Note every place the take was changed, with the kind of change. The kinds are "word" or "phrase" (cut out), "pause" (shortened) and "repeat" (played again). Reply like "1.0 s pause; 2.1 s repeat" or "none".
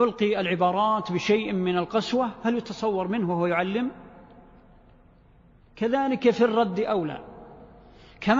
none